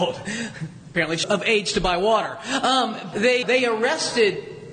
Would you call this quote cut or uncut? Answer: cut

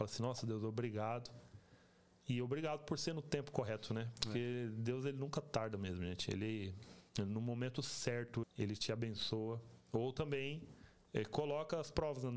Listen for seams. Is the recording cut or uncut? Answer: cut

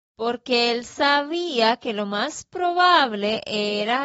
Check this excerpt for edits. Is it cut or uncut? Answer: uncut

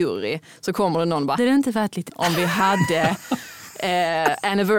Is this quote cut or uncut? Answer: cut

